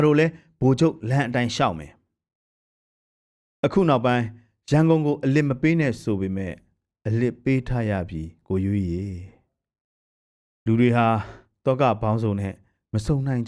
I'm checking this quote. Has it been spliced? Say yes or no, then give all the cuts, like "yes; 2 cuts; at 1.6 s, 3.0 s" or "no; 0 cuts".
no; 0 cuts